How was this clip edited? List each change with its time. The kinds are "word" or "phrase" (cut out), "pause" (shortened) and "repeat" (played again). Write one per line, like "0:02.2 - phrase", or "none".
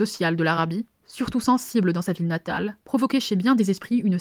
0:00.9 - pause
0:02.8 - pause